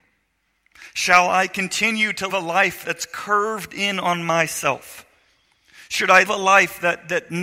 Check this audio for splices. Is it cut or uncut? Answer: cut